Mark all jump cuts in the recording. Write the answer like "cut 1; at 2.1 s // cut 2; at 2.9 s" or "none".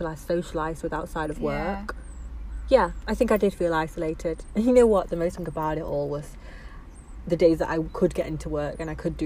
cut 1; at 5.3 s